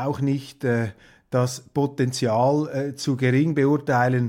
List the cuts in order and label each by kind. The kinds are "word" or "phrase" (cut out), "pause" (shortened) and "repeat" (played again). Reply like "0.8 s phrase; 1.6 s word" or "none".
none